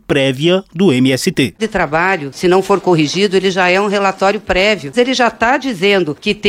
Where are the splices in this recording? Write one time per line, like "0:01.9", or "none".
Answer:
0:01.6